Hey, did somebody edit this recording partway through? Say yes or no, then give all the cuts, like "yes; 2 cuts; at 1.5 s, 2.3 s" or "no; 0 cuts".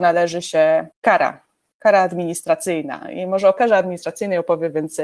yes; 1 cut; at 0.9 s